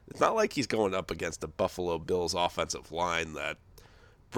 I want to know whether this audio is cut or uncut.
uncut